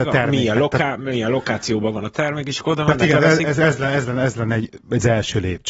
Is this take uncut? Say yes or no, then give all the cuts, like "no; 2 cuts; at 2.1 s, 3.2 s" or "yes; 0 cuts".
yes; 0 cuts